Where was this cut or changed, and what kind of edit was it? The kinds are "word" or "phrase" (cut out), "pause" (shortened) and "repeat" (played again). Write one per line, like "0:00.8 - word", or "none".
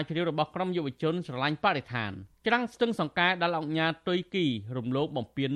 0:02.3 - pause